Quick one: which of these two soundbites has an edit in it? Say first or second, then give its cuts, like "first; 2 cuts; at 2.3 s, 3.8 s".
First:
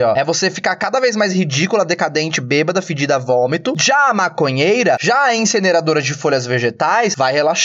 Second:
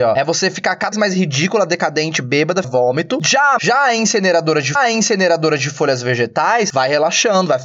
second; 4 cuts; at 0.9 s, 2.6 s, 3.6 s, 4.7 s